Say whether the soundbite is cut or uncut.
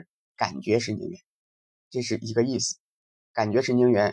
uncut